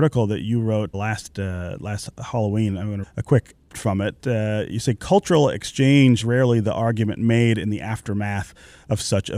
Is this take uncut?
no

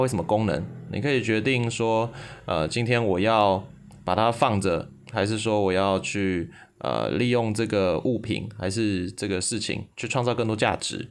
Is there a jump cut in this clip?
yes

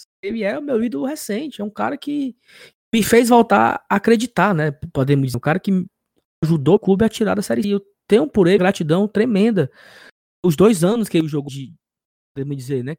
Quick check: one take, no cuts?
no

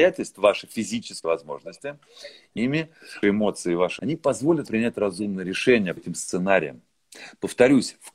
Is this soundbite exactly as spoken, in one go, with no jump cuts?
no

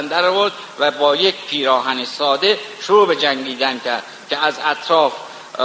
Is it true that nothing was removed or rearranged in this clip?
yes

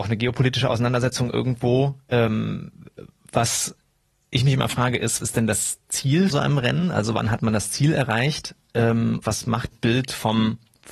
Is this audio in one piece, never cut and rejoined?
no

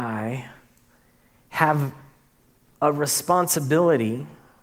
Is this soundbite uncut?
yes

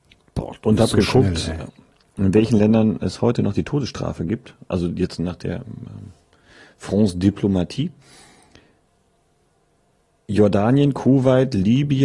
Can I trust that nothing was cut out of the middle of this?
yes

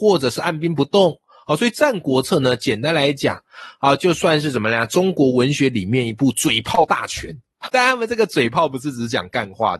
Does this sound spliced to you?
yes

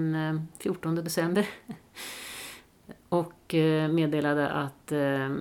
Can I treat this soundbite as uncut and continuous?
yes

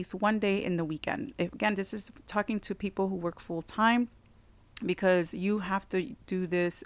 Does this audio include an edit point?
no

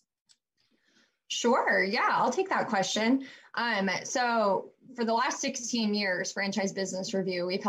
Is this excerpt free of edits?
yes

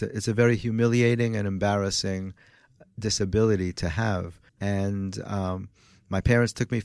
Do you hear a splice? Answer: yes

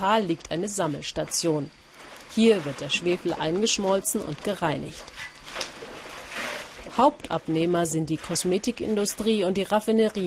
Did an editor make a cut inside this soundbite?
no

